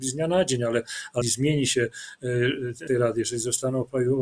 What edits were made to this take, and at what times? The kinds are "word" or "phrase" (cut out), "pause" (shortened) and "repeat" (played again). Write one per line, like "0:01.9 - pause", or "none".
0:01.2 - word
0:02.9 - word